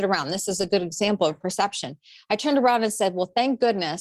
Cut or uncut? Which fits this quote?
uncut